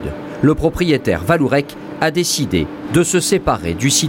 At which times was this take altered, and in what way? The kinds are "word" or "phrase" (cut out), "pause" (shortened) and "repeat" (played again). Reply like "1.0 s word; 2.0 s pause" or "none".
none